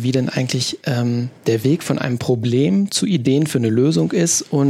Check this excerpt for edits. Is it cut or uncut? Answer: uncut